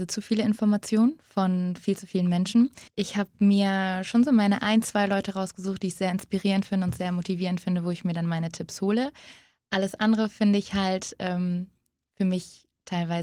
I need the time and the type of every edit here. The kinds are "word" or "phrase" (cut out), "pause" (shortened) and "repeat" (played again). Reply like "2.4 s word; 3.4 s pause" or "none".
2.9 s pause

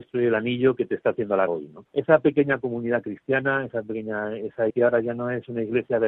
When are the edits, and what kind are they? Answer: 1.5 s word; 1.9 s pause; 4.7 s word

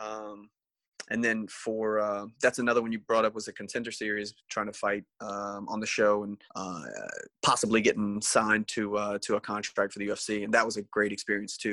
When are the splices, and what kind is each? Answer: 6.5 s pause

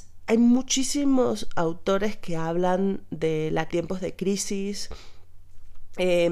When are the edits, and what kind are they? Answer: 3.7 s phrase

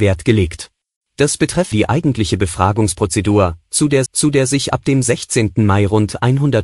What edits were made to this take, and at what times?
0.9 s pause; 1.7 s phrase; 4.1 s repeat

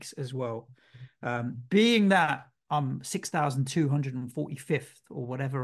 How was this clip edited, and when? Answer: none

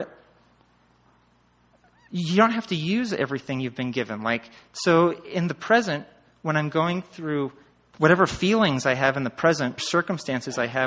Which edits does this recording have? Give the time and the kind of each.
9.8 s word

